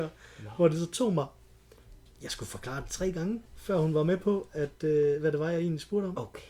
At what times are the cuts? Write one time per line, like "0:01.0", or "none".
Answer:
0:02.1
0:03.5